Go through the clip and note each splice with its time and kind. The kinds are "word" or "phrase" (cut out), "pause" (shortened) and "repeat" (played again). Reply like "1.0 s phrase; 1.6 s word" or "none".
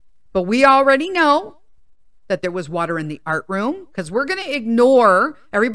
none